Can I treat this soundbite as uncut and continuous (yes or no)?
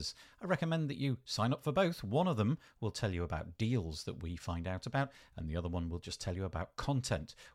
yes